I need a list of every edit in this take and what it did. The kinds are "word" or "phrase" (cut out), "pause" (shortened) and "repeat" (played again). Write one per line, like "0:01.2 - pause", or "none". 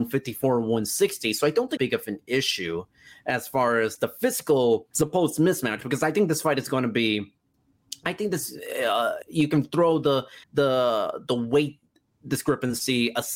0:01.8 - phrase
0:04.9 - pause
0:09.2 - phrase
0:10.4 - pause